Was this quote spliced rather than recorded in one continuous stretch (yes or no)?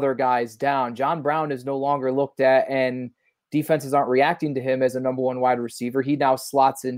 no